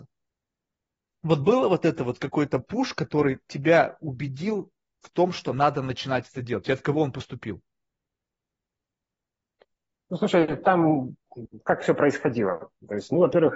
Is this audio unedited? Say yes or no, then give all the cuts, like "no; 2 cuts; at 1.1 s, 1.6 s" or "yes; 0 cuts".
yes; 0 cuts